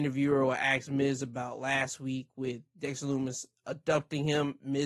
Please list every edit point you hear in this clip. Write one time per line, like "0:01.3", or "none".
none

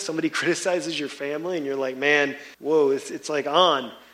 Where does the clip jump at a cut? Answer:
0:02.5

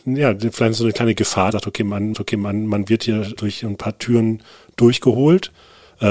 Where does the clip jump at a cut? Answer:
0:01.5
0:02.1
0:03.4

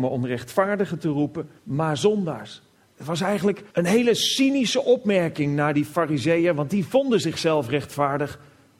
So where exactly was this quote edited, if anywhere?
0:01.6
0:02.7
0:03.7

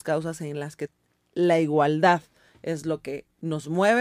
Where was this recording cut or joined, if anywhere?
none

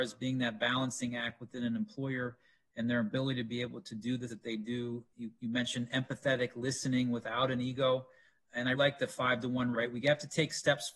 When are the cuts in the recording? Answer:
0:04.3
0:08.7
0:09.7

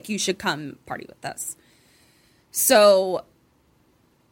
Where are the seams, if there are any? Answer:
none

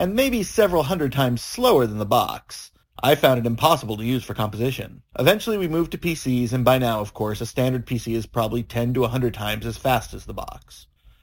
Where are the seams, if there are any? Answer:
0:05.1

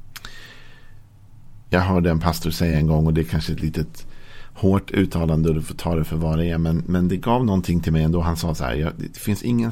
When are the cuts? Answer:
none

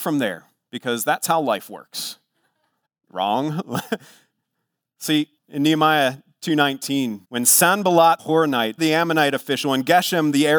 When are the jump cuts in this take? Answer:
0:02.9
0:05.4
0:07.2
0:08.2
0:08.8

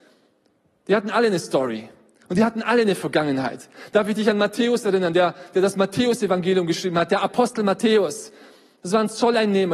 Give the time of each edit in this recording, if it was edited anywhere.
none

